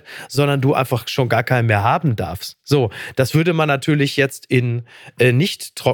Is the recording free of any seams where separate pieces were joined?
yes; 0 cuts

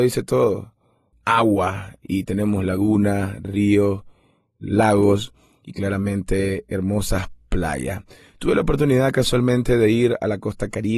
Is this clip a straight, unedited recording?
yes; 0 cuts

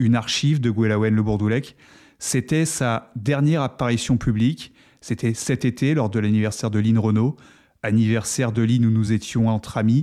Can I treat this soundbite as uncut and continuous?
yes; 0 cuts

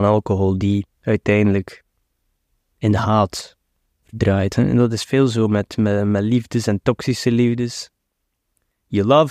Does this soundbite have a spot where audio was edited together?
yes; 2 cuts; at 0.9 s, 3.8 s

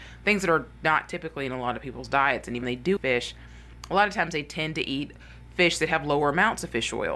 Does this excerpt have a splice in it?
yes; 2 cuts; at 2.6 s, 3.0 s

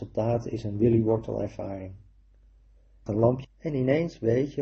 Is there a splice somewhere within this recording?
yes; 2 cuts; at 3.1 s, 3.4 s

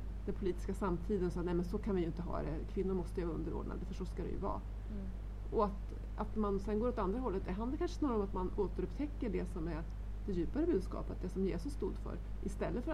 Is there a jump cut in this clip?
no; 0 cuts

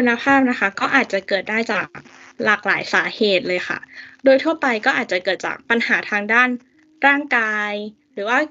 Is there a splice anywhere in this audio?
no; 0 cuts

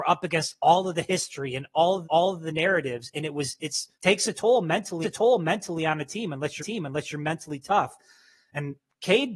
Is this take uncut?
no; 4 cuts; at 2.0 s, 3.9 s, 5.0 s, 6.6 s

